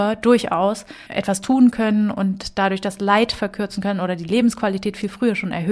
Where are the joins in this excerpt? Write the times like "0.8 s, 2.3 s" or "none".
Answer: 1.1 s